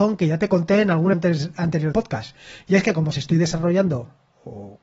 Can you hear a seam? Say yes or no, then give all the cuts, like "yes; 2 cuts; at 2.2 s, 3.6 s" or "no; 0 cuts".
yes; 3 cuts; at 1.1 s, 1.9 s, 3.1 s